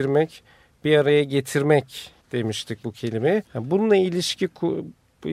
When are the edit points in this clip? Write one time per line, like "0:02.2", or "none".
0:02.2
0:03.4